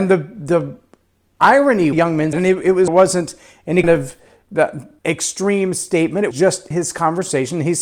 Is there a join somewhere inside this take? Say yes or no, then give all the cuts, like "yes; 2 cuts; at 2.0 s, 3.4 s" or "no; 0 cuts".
yes; 7 cuts; at 1.9 s, 2.3 s, 2.9 s, 3.8 s, 5.0 s, 6.3 s, 6.7 s